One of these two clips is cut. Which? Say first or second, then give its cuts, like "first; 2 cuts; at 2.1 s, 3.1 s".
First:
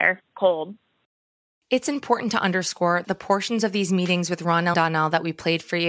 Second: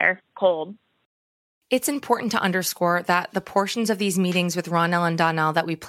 first; 2 cuts; at 3.0 s, 4.7 s